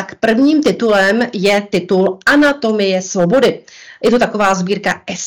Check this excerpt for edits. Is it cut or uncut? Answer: uncut